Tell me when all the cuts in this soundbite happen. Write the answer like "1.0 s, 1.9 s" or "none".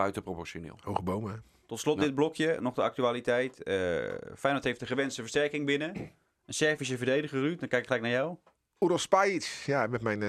none